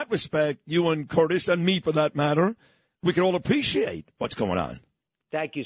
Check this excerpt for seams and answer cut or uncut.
uncut